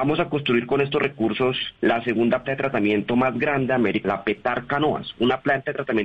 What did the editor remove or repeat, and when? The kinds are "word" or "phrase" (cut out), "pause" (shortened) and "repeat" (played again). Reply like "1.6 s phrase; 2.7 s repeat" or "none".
1.8 s pause; 2.4 s word; 4.0 s word